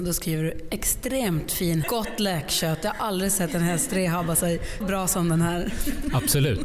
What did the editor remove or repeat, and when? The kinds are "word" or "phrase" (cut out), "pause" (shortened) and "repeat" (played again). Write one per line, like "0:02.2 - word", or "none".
0:01.8 - word
0:04.8 - word